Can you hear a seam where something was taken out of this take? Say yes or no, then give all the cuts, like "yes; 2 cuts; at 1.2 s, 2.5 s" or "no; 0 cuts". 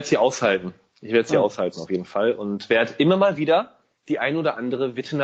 no; 0 cuts